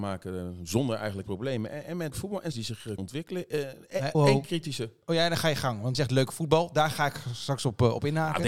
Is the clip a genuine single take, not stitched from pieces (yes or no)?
no